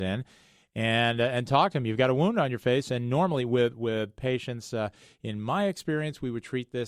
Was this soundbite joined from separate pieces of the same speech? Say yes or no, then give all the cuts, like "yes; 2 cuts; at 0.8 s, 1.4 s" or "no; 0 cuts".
no; 0 cuts